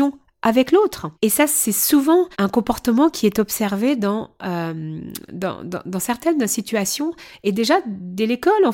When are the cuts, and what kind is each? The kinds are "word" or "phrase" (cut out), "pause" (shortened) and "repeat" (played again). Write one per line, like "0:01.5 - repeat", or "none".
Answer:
0:01.1 - pause
0:02.3 - pause